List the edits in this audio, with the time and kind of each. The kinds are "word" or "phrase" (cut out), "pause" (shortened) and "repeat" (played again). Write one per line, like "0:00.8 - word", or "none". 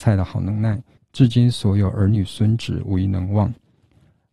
0:01.0 - pause